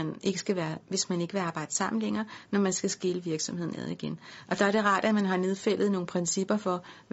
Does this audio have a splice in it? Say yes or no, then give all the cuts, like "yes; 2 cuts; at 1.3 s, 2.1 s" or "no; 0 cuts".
no; 0 cuts